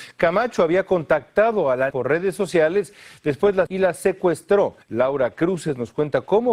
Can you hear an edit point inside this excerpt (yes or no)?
yes